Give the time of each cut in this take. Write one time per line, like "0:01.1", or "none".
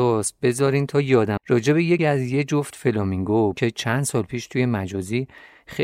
0:01.4
0:02.0
0:03.5